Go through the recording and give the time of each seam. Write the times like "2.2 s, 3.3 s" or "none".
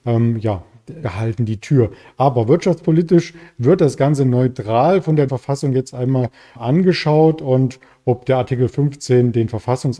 1.0 s, 5.3 s, 5.9 s, 6.6 s